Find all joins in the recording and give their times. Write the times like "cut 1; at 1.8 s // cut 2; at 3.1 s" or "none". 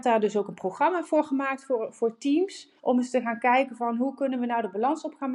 cut 1; at 2.8 s